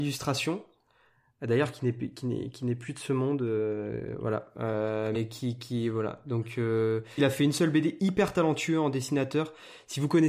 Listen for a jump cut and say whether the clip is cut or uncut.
cut